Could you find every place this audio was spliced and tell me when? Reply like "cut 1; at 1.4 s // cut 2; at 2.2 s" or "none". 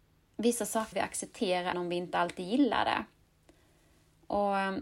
cut 1; at 0.9 s // cut 2; at 1.7 s